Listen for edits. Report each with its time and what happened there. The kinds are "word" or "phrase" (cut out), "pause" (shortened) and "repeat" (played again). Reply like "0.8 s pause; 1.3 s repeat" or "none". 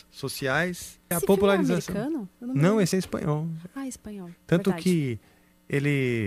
1.1 s word; 2.9 s word